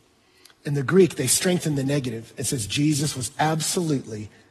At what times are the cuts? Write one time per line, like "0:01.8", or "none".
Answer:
none

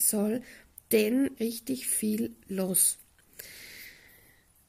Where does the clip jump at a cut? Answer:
0:01.4

